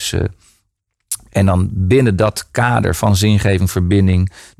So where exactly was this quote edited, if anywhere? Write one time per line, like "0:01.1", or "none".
none